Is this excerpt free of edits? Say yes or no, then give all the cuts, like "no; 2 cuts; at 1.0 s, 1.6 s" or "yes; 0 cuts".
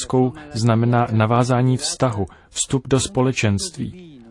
yes; 0 cuts